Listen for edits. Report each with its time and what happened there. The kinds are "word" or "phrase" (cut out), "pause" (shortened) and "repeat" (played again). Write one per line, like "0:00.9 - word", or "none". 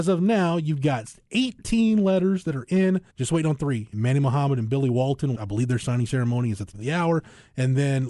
0:03.1 - pause
0:03.9 - phrase
0:05.3 - word
0:06.7 - word